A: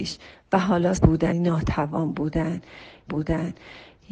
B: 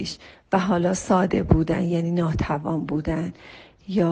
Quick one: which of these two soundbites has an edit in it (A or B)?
A